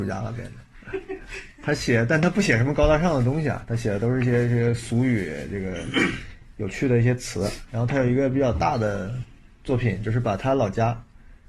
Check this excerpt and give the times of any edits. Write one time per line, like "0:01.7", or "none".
0:09.5